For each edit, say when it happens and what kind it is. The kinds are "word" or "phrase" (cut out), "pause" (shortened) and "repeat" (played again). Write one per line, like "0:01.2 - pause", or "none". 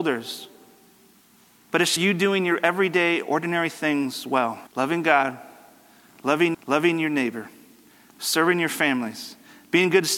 0:02.0 - word
0:04.7 - pause
0:06.5 - repeat